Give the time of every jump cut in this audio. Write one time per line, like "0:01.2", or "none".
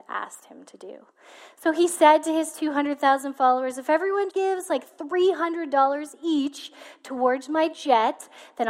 0:04.3